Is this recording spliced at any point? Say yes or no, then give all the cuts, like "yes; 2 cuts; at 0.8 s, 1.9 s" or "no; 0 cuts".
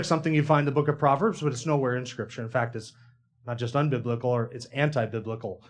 no; 0 cuts